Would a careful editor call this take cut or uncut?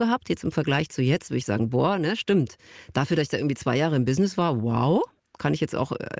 cut